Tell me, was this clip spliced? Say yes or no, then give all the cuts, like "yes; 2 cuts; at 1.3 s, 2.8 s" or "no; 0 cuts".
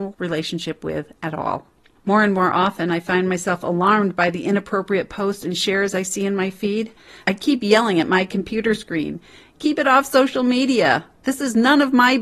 no; 0 cuts